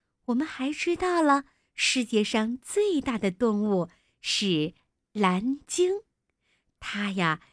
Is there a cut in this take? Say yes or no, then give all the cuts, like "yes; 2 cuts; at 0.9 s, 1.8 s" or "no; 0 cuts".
no; 0 cuts